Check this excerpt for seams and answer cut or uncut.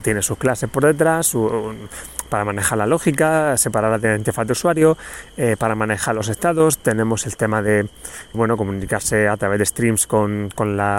cut